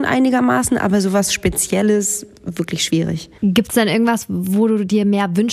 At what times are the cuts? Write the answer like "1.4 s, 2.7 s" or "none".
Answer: 3.4 s